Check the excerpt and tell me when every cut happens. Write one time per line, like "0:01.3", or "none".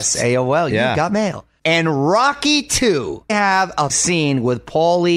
0:03.3
0:03.9